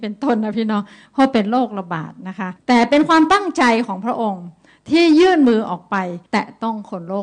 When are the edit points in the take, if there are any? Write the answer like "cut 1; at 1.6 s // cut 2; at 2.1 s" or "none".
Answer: cut 1; at 2.6 s // cut 2; at 6.3 s

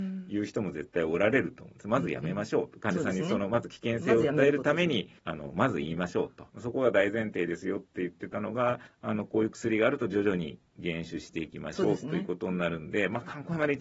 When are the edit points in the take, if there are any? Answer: cut 1; at 5.2 s // cut 2; at 6.5 s // cut 3; at 8.9 s // cut 4; at 10.7 s

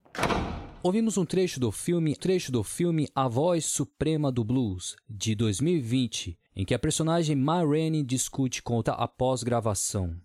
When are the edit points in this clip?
cut 1; at 2.2 s // cut 2; at 6.5 s // cut 3; at 8.8 s

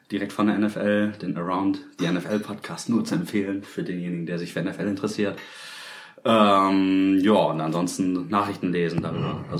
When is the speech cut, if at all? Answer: none

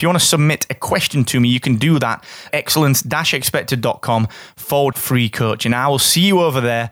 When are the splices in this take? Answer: cut 1; at 2.5 s // cut 2; at 4.9 s

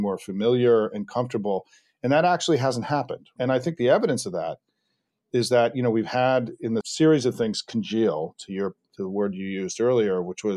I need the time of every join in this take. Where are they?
cut 1; at 6.8 s

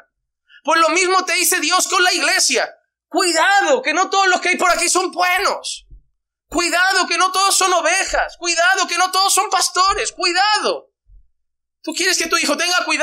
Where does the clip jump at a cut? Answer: none

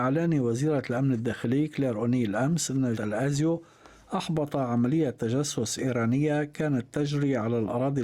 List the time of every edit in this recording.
cut 1; at 2.9 s

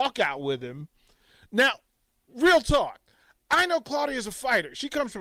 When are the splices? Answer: none

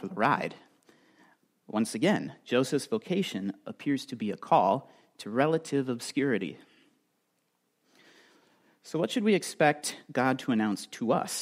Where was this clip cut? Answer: none

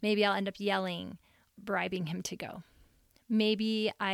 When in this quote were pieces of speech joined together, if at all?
cut 1; at 1.6 s

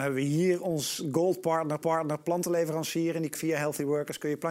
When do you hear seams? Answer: cut 1; at 1.8 s // cut 2; at 3.3 s

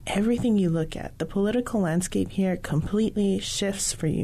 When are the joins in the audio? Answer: none

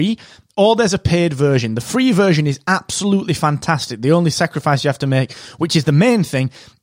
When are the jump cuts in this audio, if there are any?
none

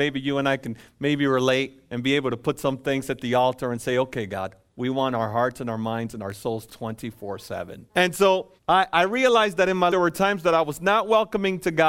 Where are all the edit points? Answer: cut 1; at 6.7 s // cut 2; at 7.9 s // cut 3; at 8.6 s // cut 4; at 9.9 s

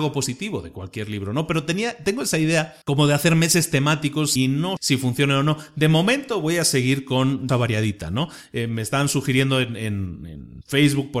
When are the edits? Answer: cut 1; at 2.8 s // cut 2; at 4.4 s // cut 3; at 4.8 s // cut 4; at 7.5 s

